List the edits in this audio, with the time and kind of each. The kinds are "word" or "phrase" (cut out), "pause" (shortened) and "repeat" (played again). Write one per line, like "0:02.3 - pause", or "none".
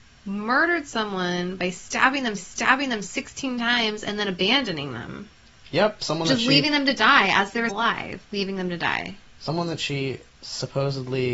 0:02.4 - repeat
0:07.7 - word